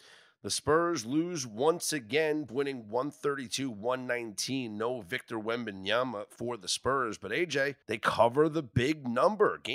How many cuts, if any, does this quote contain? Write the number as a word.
two